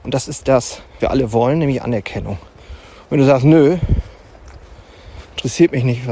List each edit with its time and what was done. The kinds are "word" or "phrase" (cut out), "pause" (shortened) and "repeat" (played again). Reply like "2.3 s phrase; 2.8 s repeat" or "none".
1.0 s word